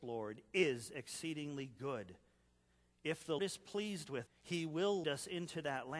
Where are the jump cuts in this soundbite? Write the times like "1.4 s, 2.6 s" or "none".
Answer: 3.4 s, 4.3 s, 5.0 s